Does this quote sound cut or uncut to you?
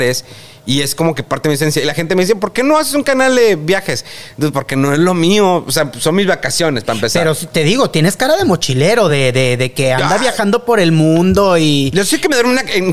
uncut